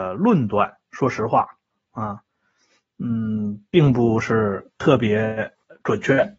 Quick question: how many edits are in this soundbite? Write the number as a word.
zero